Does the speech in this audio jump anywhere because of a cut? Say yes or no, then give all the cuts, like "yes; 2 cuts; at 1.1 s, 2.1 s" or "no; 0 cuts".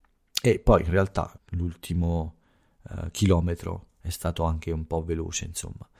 yes; 1 cut; at 1.4 s